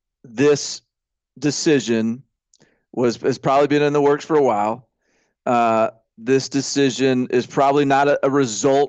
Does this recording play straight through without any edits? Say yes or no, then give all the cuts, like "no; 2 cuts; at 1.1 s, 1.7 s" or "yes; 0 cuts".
yes; 0 cuts